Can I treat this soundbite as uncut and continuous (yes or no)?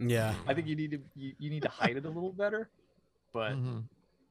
yes